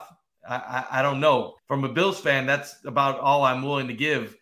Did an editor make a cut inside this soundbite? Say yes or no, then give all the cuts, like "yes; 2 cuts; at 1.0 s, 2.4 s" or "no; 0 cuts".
yes; 1 cut; at 1.6 s